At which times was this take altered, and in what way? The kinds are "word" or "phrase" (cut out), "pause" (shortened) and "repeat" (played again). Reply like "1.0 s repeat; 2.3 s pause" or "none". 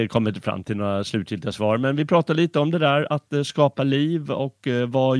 none